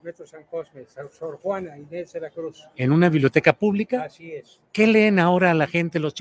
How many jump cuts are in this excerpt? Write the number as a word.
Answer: one